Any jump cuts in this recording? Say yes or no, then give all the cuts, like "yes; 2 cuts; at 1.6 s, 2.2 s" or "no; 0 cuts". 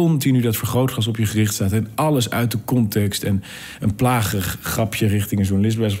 no; 0 cuts